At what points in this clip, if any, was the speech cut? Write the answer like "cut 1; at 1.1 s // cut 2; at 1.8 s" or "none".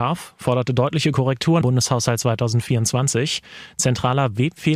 cut 1; at 1.6 s